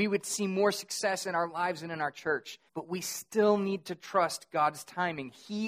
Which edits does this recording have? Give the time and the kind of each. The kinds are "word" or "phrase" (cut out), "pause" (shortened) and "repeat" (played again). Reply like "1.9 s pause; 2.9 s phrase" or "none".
2.7 s pause